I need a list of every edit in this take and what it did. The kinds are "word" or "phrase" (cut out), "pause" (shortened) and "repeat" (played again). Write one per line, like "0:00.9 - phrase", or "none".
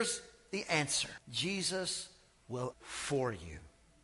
0:01.2 - pause
0:02.7 - word